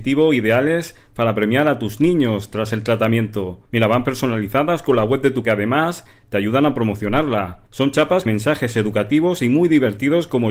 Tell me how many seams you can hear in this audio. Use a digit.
4